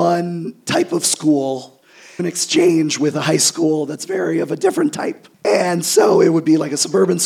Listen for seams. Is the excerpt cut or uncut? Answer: cut